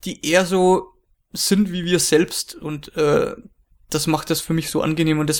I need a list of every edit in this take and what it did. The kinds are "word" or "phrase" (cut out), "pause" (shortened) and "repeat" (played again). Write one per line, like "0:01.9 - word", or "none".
none